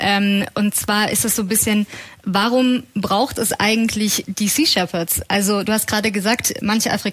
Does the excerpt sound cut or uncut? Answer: uncut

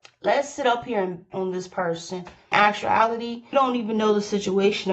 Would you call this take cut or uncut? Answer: cut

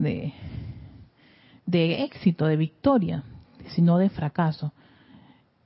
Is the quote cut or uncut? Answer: uncut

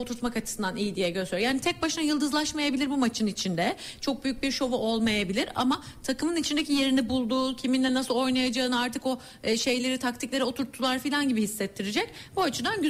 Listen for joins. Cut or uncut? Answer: uncut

